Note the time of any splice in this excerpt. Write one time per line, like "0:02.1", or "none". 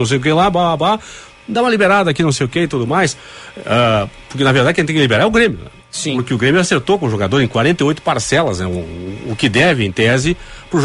0:05.8

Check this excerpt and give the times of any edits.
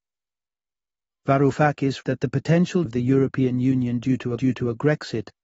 0:02.0
0:02.9
0:04.4

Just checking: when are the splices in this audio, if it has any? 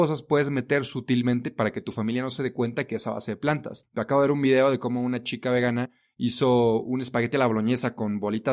none

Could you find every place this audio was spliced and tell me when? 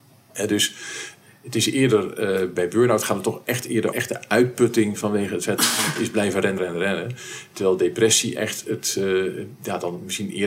0:02.6
0:03.9
0:06.6

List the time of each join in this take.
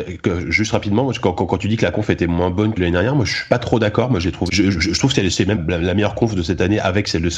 0:02.8
0:04.5
0:05.6

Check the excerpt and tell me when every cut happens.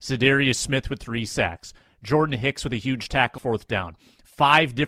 0:03.4

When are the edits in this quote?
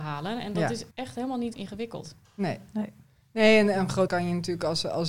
0:00.9
0:01.5
0:04.1

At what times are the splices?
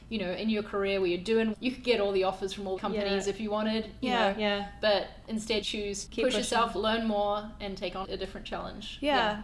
0:01.5
0:02.8
0:05.6
0:06.1
0:08.0

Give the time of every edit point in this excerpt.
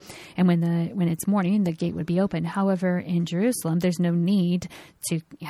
none

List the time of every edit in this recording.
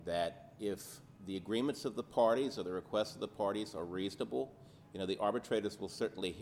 0:01.2

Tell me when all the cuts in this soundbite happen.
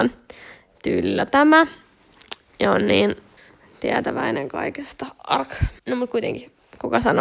0:03.4
0:05.8

